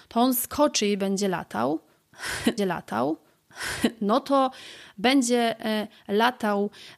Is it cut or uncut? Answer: cut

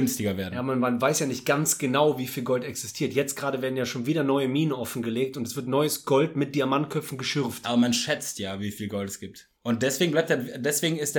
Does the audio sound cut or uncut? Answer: cut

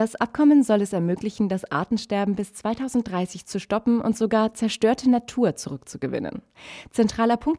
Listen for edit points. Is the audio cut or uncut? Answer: uncut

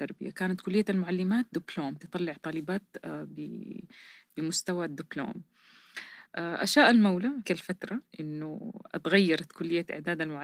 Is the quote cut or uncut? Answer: cut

